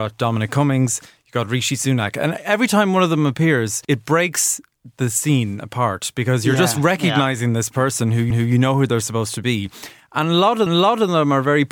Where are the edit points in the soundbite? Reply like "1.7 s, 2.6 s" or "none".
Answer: 3.8 s, 8.3 s, 10.7 s

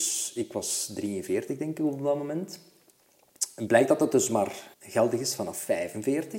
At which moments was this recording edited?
4.7 s

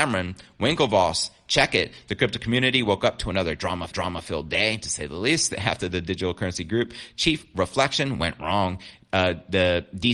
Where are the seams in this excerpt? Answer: 3.9 s

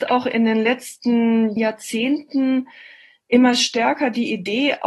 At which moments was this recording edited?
1.6 s

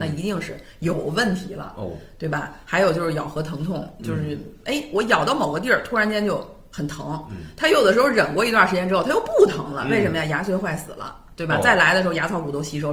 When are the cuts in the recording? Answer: none

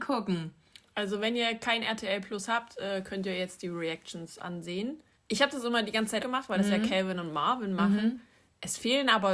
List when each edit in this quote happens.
5.1 s, 6.2 s

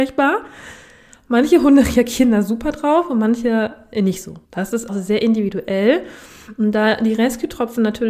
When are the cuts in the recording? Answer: 4.4 s, 4.9 s

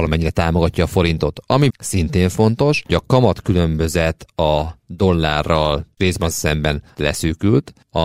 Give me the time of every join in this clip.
1.7 s, 2.9 s, 6.0 s, 6.3 s, 6.9 s

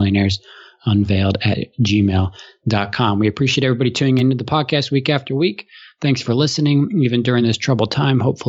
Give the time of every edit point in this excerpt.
none

